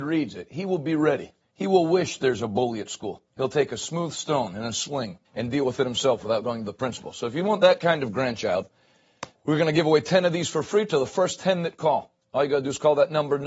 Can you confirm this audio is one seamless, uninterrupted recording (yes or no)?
no